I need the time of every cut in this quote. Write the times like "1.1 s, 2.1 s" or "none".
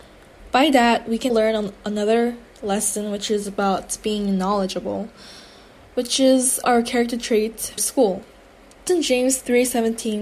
1.3 s, 6.6 s, 7.8 s, 8.9 s